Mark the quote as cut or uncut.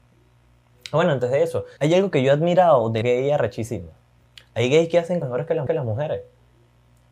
cut